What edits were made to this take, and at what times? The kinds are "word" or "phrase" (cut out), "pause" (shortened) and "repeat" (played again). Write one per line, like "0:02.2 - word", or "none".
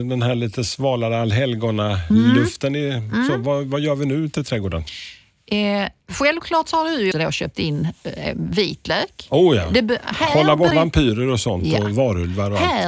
0:06.0 - pause
0:07.1 - word
0:10.7 - word